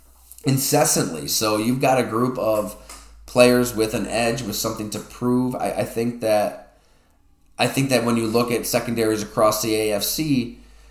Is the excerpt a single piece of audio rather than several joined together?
yes; 0 cuts

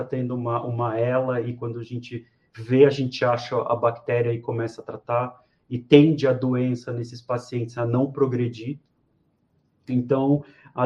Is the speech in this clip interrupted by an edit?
no; 0 cuts

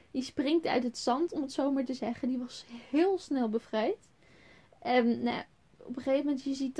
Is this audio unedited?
yes; 0 cuts

